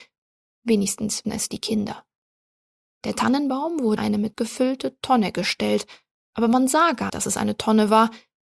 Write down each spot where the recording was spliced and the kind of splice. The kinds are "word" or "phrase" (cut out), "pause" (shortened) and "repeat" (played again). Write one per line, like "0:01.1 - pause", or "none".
0:01.2 - word
0:04.0 - word
0:04.3 - word
0:07.1 - word

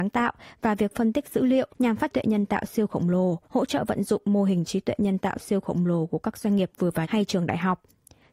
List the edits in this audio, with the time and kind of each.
0:01.7 - pause
0:02.1 - phrase
0:03.4 - pause
0:07.0 - word

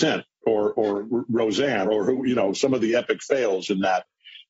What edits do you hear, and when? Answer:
0:01.8 - word

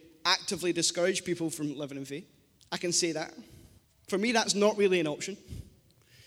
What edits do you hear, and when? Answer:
0:02.6 - pause
0:03.8 - pause

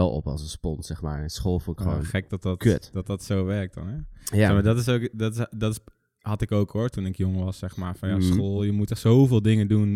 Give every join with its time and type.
none

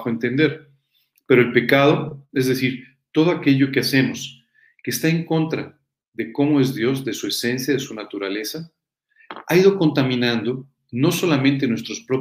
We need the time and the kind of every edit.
none

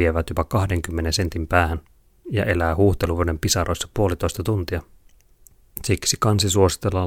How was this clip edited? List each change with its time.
none

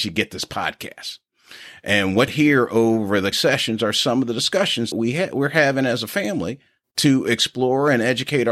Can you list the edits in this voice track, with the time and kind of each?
0:02.3 - word
0:03.3 - word
0:04.9 - word

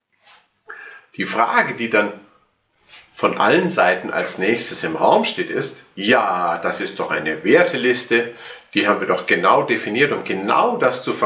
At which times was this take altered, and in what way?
none

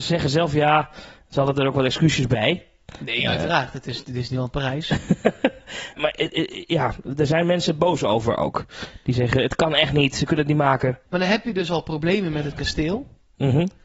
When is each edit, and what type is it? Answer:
0:06.0 - word
0:11.1 - pause

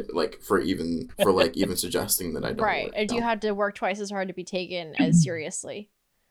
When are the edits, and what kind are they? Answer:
0:01.1 - word
0:03.1 - word

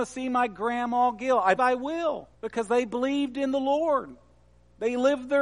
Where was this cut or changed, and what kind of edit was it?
0:01.6 - word
0:02.3 - pause

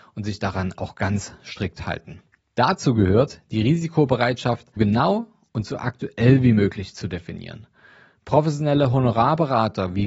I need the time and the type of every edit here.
0:04.8 - word

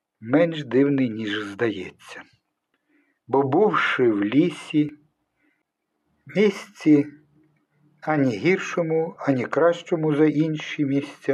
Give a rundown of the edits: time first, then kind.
none

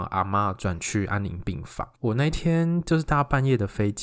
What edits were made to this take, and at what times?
0:01.9 - pause

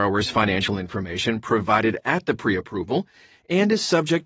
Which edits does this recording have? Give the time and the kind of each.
none

